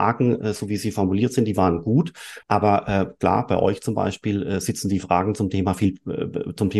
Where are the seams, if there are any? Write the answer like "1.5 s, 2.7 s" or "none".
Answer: 2.4 s

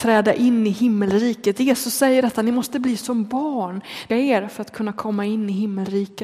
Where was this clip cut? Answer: 4.1 s

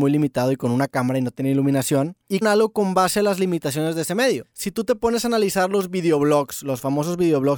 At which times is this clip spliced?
2.4 s

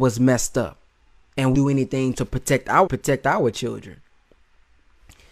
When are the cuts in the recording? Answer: 1.5 s, 2.1 s, 2.9 s

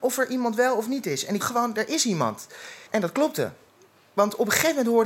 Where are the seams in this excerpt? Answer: 1.4 s, 2.9 s

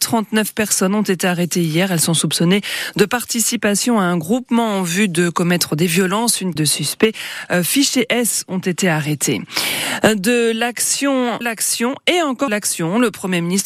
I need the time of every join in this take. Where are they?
6.6 s, 11.4 s, 12.5 s

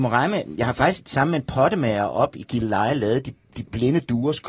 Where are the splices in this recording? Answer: none

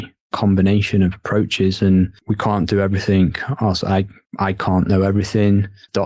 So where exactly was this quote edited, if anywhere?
none

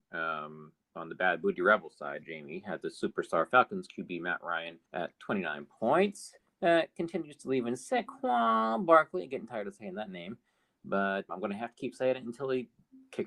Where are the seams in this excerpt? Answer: 2.2 s, 4.9 s, 6.4 s, 11.3 s

